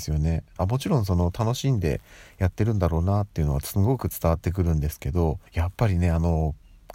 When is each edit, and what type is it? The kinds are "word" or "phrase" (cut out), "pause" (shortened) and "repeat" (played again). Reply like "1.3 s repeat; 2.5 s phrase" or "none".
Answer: 5.5 s pause